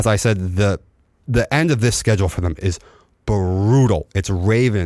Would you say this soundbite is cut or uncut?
uncut